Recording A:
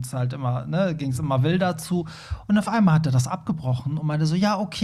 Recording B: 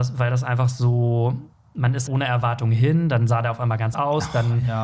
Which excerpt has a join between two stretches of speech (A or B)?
B